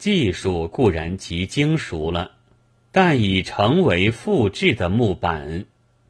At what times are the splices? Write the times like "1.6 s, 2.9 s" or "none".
2.6 s